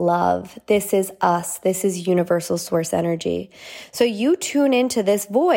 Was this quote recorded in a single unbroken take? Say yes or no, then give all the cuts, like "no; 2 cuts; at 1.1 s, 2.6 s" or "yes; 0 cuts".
yes; 0 cuts